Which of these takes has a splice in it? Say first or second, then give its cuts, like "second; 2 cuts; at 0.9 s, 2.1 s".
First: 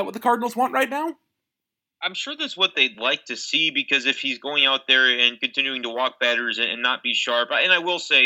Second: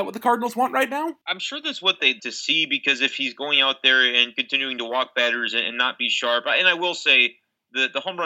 second; 2 cuts; at 1.2 s, 2.2 s